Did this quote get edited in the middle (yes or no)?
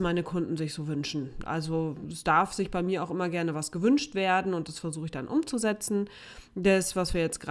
no